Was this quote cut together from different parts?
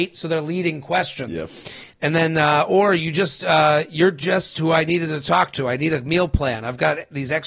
no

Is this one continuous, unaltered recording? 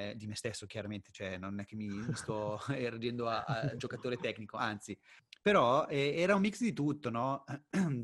yes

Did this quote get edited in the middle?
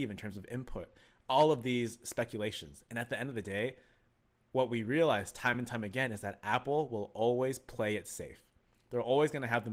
no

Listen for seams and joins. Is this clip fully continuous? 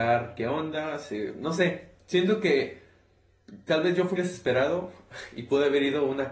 no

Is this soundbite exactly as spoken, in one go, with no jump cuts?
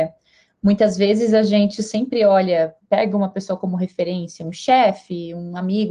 yes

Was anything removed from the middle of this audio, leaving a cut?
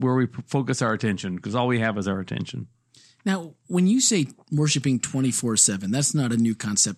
no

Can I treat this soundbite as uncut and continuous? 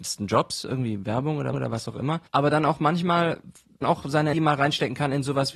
no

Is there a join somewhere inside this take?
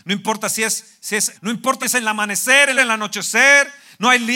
yes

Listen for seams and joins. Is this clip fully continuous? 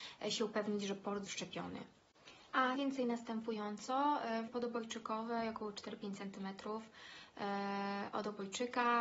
no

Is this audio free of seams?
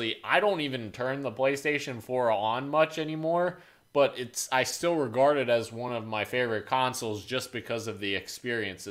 yes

